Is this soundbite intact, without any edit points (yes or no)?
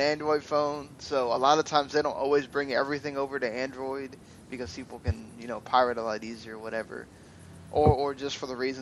yes